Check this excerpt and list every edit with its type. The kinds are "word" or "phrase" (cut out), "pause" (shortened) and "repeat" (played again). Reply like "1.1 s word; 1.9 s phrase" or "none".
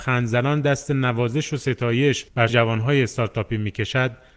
2.5 s word